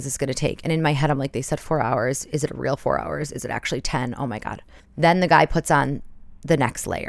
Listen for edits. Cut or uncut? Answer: cut